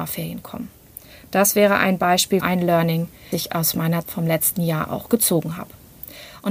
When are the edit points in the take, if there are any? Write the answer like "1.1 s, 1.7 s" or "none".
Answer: 2.4 s, 3.3 s, 4.0 s